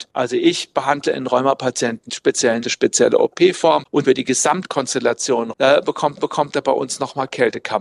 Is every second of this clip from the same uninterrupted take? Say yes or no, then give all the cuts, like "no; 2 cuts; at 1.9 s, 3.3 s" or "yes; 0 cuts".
no; 5 cuts; at 2.1 s, 2.6 s, 4.0 s, 5.5 s, 6.2 s